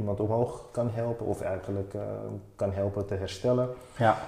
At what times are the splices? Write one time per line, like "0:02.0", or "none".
none